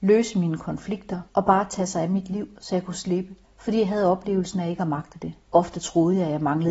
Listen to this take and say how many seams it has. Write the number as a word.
three